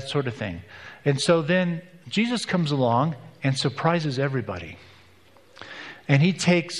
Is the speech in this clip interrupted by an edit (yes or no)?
no